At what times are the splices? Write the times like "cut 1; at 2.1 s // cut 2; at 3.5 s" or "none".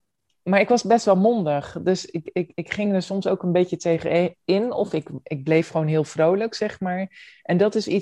none